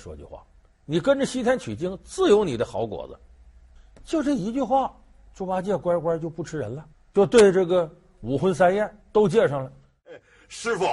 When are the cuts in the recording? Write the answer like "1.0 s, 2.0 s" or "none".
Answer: 6.9 s, 9.0 s